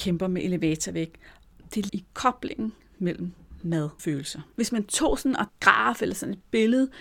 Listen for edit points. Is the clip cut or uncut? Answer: cut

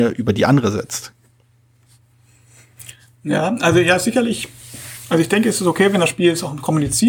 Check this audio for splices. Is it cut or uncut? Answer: uncut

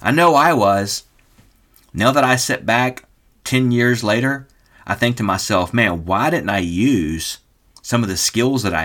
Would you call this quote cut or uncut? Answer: uncut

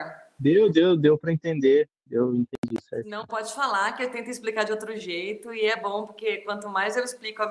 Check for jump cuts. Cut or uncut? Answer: uncut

